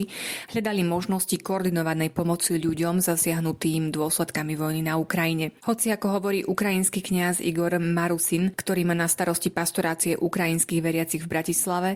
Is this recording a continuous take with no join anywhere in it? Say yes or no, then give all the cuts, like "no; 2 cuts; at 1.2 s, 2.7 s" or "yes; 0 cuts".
no; 1 cut; at 5.6 s